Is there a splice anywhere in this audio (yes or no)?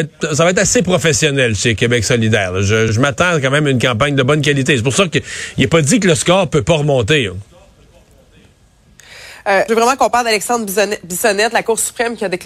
yes